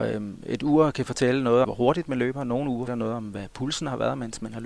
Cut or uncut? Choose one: cut